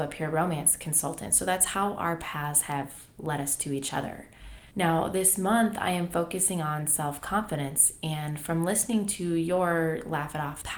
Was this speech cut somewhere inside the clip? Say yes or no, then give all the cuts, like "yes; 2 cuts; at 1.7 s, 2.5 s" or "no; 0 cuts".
yes; 1 cut; at 4.7 s